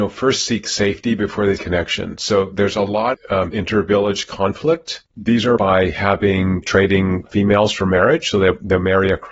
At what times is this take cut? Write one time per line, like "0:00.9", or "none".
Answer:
0:01.6
0:03.1
0:03.5
0:05.6
0:06.6
0:07.3